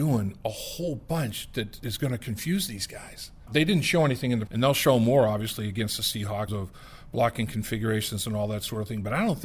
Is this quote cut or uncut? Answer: cut